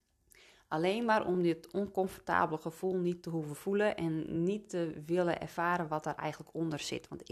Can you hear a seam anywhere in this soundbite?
no; 0 cuts

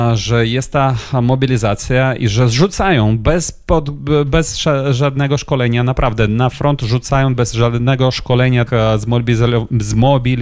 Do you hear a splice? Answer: yes; 1 cut; at 8.7 s

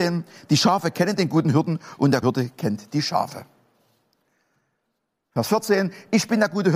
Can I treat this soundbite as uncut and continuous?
no; 1 cut; at 2.2 s

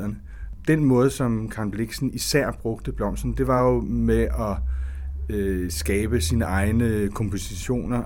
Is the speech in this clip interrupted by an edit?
no; 0 cuts

